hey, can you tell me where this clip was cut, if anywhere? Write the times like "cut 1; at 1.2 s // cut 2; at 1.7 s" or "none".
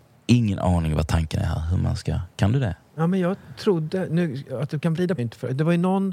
cut 1; at 5.2 s